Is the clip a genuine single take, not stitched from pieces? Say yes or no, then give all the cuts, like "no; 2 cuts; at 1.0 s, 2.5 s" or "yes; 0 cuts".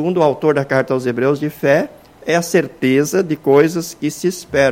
yes; 0 cuts